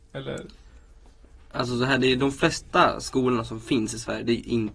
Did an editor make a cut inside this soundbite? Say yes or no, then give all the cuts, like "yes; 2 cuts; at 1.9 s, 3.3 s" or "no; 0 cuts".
no; 0 cuts